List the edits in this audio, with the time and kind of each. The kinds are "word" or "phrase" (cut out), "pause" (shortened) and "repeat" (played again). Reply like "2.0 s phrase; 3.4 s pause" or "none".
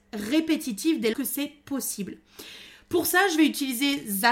1.1 s word